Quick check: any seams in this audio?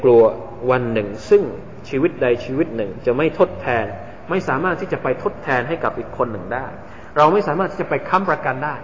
no; 0 cuts

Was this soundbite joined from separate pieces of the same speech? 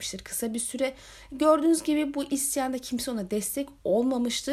no; 0 cuts

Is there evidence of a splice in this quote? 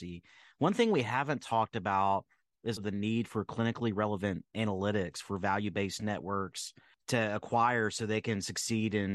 yes; 1 cut; at 2.8 s

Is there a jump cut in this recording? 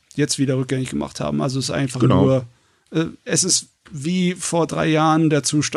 no; 0 cuts

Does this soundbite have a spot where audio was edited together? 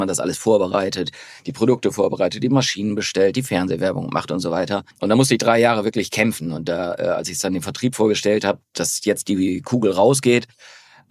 yes; 1 cut; at 4.9 s

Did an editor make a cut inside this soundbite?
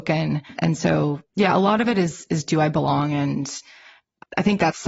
no; 0 cuts

